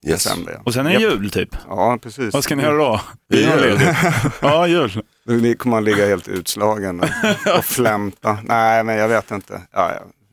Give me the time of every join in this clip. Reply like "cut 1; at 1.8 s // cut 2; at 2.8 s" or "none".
none